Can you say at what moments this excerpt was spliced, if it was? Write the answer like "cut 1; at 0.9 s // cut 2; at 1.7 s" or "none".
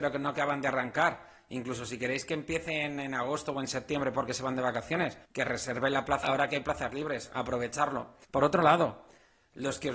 cut 1; at 5.2 s // cut 2; at 6.2 s // cut 3; at 8.2 s